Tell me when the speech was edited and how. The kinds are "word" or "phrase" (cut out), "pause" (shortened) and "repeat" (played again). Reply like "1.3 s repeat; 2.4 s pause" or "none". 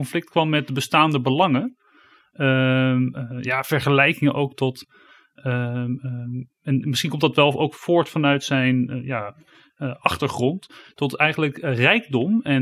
none